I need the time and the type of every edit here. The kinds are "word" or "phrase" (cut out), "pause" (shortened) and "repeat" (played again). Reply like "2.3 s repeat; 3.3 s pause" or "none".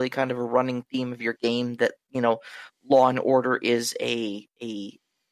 none